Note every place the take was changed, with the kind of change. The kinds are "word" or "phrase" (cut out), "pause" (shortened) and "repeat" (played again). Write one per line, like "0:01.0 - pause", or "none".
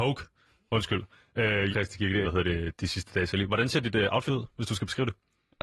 0:01.7 - word
0:02.2 - word
0:04.3 - word